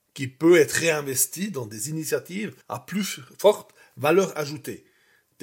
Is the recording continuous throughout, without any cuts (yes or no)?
no